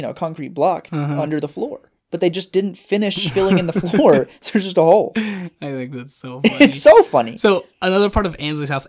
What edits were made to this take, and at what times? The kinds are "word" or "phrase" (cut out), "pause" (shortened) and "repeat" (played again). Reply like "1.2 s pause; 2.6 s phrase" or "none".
2.0 s pause